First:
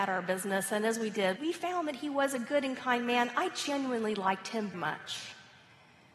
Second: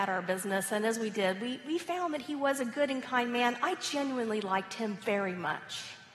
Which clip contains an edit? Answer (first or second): first